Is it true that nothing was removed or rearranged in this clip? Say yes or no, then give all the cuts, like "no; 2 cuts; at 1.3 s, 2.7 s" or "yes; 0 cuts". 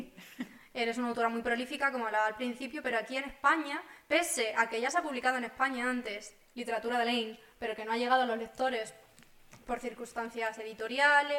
yes; 0 cuts